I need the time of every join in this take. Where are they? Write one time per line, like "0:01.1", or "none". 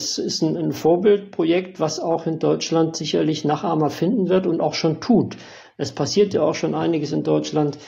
none